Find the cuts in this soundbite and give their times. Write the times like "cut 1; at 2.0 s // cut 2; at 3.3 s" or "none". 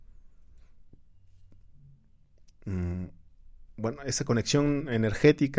none